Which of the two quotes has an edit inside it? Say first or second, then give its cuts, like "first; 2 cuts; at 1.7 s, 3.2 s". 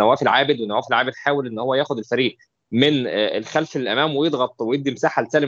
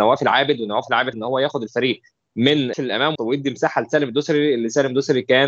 second; 3 cuts; at 1.1 s, 2.7 s, 3.2 s